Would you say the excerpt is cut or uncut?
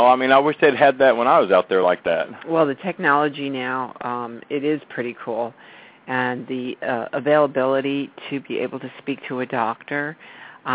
uncut